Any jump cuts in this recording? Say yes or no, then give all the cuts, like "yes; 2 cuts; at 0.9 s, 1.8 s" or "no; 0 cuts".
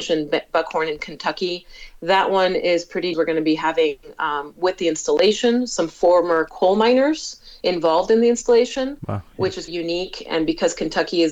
yes; 2 cuts; at 3.1 s, 9.7 s